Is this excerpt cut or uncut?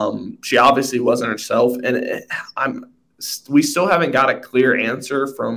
uncut